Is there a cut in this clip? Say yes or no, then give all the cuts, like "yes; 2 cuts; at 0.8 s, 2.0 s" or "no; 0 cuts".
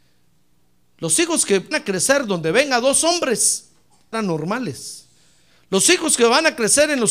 yes; 2 cuts; at 1.7 s, 4.1 s